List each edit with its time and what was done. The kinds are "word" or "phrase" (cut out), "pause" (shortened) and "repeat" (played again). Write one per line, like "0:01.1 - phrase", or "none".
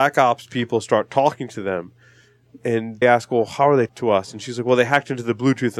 0:03.0 - word
0:03.9 - word